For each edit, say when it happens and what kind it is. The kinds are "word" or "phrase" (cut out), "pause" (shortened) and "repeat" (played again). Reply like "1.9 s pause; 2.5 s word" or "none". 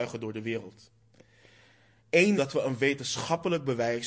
2.4 s word